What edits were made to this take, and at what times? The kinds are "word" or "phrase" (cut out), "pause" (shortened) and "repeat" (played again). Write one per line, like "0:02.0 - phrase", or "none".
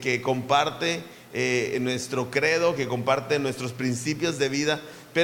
none